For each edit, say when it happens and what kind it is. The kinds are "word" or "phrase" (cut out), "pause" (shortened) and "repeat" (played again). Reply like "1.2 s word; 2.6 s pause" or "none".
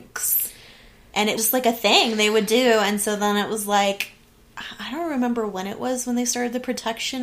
1.4 s word